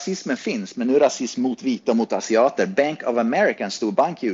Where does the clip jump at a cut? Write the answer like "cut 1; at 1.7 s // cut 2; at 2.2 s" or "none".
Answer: none